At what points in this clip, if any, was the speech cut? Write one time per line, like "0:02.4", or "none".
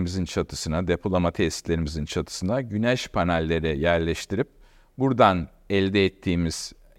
none